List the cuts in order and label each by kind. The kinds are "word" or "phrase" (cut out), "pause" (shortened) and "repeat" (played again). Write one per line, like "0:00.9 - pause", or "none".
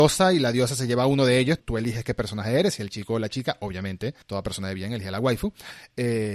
0:01.6 - word
0:04.2 - pause